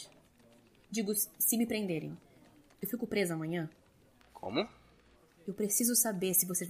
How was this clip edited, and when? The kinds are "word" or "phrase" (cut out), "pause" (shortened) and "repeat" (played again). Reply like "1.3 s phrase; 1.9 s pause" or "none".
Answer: none